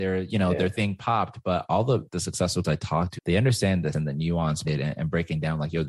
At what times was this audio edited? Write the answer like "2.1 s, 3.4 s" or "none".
2.1 s, 2.6 s, 3.2 s, 3.9 s, 4.6 s